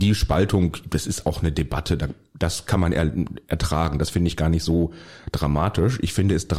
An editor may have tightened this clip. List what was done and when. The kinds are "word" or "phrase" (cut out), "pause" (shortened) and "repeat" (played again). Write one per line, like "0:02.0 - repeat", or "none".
none